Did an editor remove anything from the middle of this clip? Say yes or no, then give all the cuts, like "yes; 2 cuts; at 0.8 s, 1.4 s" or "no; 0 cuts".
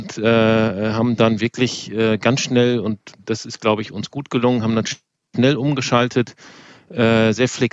no; 0 cuts